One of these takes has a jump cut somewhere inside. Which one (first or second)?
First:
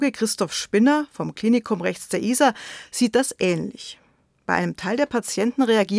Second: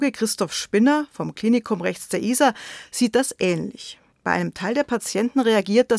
second